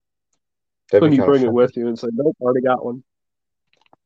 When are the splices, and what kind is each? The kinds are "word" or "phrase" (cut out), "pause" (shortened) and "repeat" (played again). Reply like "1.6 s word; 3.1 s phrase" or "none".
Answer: none